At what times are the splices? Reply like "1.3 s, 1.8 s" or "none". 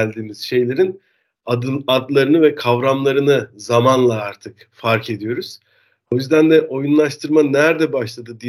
none